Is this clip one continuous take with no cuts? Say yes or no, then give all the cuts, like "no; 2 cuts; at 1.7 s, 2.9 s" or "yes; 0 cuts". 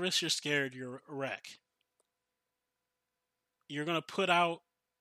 yes; 0 cuts